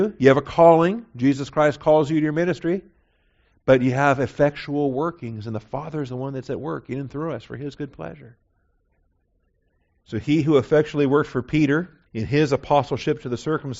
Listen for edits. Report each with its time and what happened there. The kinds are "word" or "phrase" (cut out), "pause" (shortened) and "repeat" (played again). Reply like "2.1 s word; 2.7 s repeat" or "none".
12.1 s pause